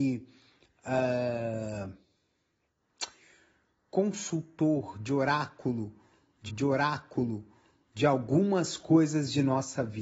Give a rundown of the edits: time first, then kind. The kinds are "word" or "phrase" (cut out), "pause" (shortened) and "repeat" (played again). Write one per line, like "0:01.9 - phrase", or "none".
0:06.5 - repeat